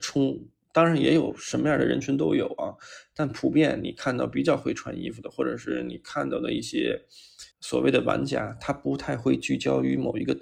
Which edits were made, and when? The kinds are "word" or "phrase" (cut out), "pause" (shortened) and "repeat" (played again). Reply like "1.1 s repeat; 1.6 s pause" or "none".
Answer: 7.5 s pause